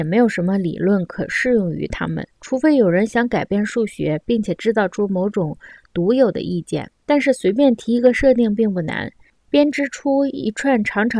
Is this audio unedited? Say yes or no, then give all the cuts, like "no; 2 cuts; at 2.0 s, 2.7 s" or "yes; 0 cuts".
no; 2 cuts; at 2.3 s, 7.0 s